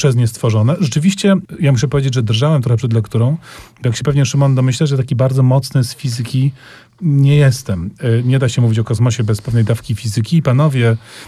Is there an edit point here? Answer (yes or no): no